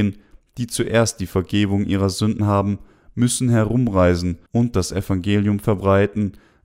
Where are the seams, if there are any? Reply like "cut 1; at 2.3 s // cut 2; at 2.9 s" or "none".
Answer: cut 1; at 2.4 s // cut 2; at 4.5 s